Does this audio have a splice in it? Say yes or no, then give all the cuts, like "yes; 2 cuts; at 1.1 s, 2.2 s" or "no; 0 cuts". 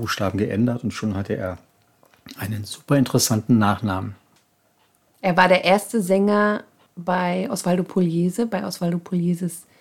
no; 0 cuts